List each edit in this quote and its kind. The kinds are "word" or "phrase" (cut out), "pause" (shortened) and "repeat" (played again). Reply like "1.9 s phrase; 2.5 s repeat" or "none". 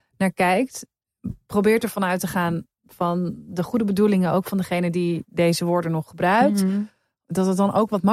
none